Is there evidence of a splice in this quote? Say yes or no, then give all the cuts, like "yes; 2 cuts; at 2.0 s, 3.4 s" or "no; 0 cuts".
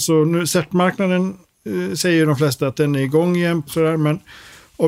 no; 0 cuts